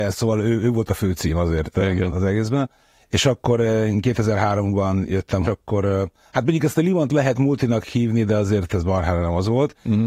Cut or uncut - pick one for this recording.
cut